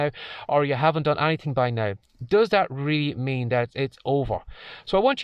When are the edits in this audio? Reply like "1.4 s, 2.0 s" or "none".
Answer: none